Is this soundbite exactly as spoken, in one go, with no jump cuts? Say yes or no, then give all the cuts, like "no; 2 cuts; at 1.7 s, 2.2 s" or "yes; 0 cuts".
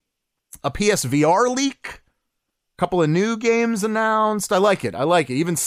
yes; 0 cuts